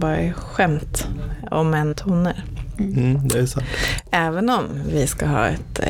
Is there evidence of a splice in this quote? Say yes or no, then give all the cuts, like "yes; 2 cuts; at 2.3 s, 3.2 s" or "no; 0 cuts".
yes; 1 cut; at 1.9 s